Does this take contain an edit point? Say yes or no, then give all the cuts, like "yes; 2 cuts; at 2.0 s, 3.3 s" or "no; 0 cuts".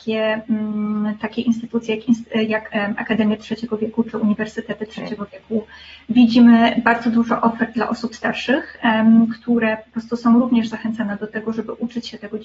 no; 0 cuts